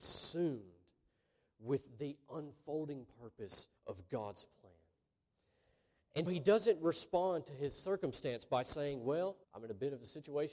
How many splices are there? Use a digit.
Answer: 3